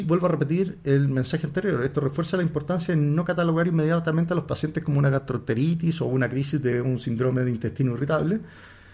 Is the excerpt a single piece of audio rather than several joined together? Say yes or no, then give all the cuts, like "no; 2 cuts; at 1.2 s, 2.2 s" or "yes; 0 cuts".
yes; 0 cuts